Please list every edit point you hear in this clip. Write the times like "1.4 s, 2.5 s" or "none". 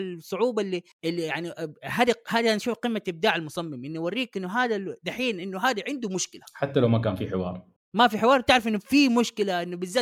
0.9 s, 7.8 s

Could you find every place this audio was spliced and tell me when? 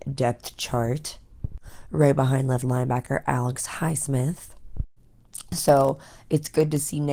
2.6 s

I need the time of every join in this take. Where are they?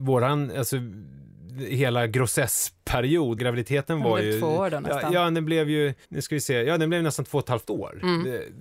3.4 s, 6.0 s

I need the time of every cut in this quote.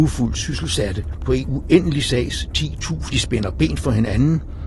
3.1 s

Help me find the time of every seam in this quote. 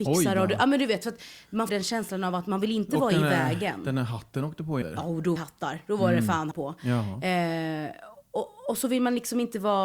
1.7 s, 4.8 s, 5.4 s, 6.5 s

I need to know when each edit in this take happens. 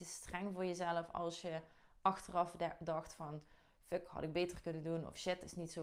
none

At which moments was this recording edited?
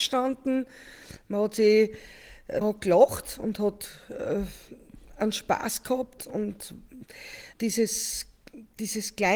2.6 s, 6.2 s, 7.5 s

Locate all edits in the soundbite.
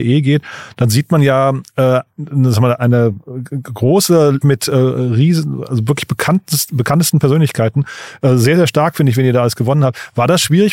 2.8 s, 4.4 s

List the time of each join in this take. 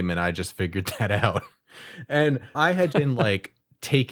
2.5 s, 2.9 s

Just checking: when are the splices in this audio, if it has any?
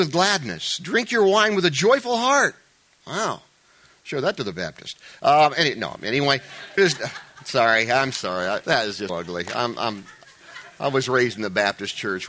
6.8 s, 8.6 s, 9.1 s

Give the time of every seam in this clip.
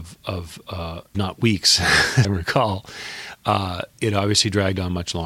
1.1 s, 2.2 s

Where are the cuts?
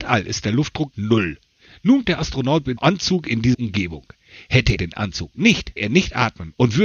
0.9 s, 2.0 s, 2.8 s, 3.5 s, 4.8 s, 5.8 s

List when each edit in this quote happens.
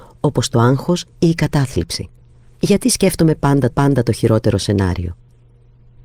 1.1 s, 2.2 s, 3.7 s

